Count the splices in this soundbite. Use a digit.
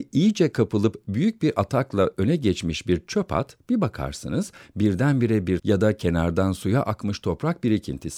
1